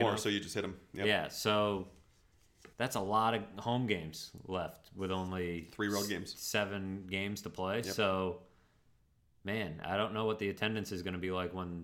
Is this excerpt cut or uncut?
cut